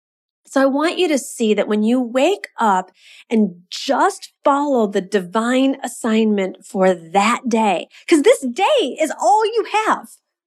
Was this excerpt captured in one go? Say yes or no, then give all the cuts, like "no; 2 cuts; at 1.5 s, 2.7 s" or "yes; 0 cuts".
yes; 0 cuts